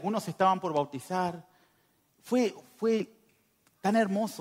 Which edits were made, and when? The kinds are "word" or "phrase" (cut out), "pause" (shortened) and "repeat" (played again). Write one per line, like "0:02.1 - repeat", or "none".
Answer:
none